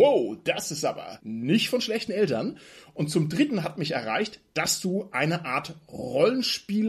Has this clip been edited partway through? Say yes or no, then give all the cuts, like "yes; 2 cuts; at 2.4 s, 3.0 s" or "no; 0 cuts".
no; 0 cuts